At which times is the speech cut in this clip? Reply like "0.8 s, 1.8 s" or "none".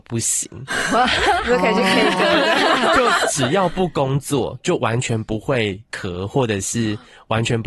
none

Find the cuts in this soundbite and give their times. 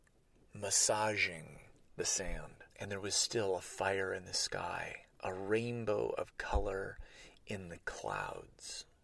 2.7 s, 5.1 s

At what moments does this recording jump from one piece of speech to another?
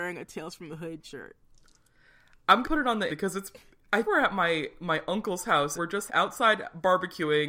1.0 s, 2.6 s, 3.1 s, 4.0 s, 5.8 s, 6.1 s

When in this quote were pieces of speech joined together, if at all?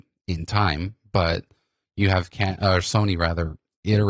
none

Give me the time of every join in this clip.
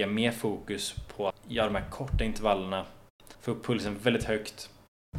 1.3 s, 3.3 s

